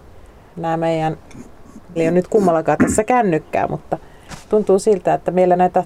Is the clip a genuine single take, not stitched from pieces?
no; 1 cut; at 2.0 s

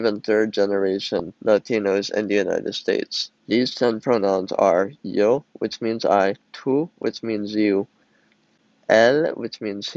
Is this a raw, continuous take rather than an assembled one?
no; 3 cuts; at 1.4 s, 3.4 s, 6.5 s

